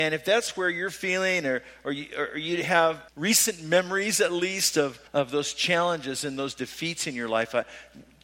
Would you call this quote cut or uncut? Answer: cut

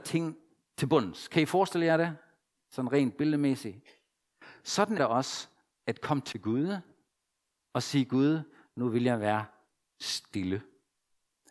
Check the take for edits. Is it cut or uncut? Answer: cut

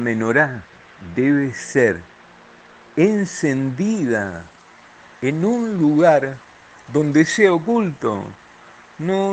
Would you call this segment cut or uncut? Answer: uncut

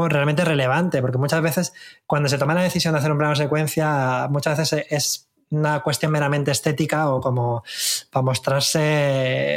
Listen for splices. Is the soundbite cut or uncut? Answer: uncut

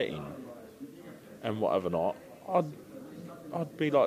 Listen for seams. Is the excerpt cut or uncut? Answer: uncut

